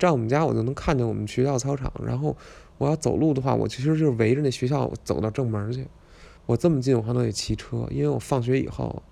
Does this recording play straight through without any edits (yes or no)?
no